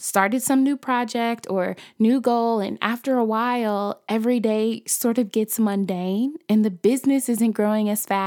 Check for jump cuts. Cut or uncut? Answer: uncut